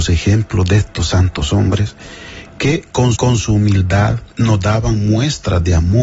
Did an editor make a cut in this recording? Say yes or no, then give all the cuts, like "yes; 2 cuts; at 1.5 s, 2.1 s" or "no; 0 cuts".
yes; 2 cuts; at 3.1 s, 4.3 s